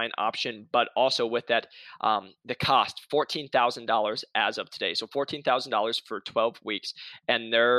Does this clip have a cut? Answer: no; 0 cuts

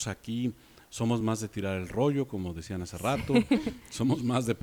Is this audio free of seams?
yes; 0 cuts

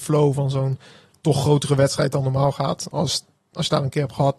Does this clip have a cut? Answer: no; 0 cuts

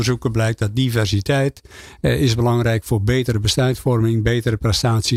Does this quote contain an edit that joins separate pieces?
no; 0 cuts

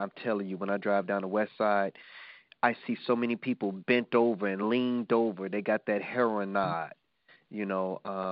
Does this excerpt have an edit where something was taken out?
no; 0 cuts

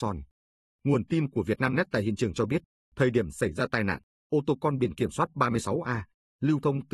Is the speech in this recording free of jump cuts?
no; 1 cut; at 2.7 s

